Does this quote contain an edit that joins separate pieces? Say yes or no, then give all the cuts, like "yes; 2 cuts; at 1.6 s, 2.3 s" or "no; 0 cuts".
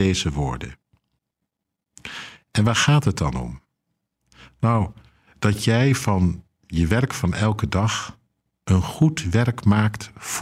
no; 0 cuts